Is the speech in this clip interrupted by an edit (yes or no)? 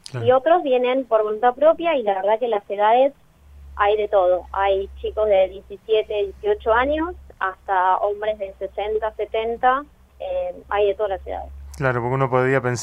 no